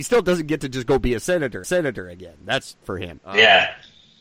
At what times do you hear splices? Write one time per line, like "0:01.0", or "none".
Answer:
0:01.6
0:02.8
0:03.2